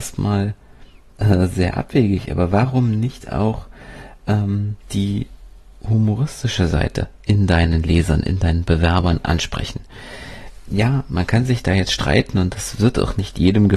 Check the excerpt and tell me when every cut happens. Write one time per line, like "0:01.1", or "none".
0:04.8